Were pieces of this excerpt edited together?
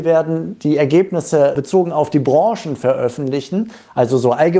no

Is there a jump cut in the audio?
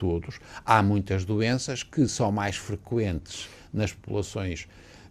no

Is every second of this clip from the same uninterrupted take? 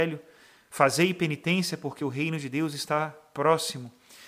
yes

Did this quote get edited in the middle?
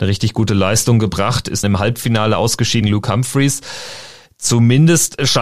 yes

